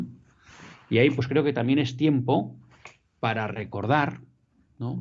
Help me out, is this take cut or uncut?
uncut